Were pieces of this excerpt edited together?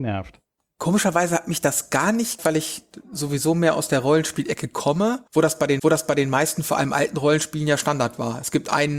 yes; 3 cuts; at 2.4 s, 5.3 s, 5.8 s

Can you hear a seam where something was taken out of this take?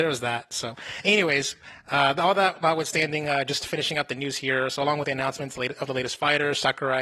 no; 0 cuts

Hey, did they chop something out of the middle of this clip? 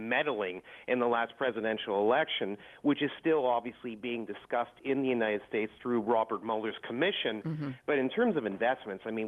no; 0 cuts

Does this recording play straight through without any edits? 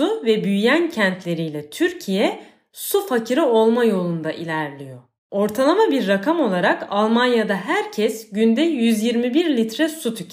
yes; 0 cuts

